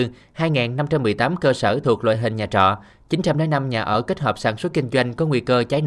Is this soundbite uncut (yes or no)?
yes